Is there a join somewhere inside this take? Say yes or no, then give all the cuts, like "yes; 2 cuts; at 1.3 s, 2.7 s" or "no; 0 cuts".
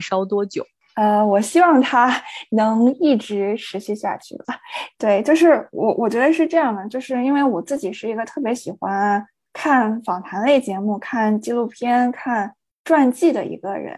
no; 0 cuts